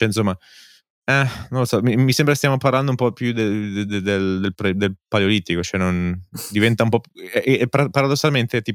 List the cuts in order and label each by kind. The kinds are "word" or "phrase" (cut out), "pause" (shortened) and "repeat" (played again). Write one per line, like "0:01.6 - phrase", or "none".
none